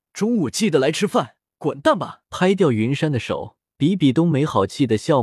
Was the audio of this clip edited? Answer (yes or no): yes